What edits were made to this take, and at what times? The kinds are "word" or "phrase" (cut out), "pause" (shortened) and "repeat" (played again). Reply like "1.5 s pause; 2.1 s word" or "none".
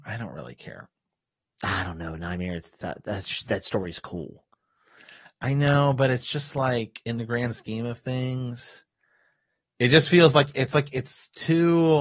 none